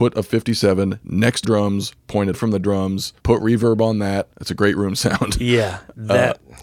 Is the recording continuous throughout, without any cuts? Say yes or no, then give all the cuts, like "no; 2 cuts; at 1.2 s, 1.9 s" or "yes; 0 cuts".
no; 4 cuts; at 1.4 s, 2.3 s, 3.2 s, 4.3 s